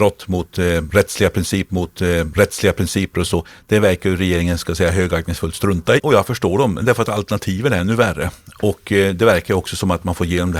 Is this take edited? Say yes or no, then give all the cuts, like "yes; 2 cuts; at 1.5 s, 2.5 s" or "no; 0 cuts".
yes; 2 cuts; at 1.7 s, 6.0 s